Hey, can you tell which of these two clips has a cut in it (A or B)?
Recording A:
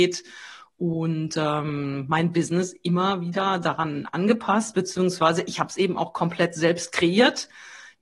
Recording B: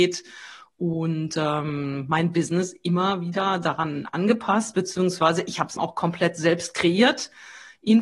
B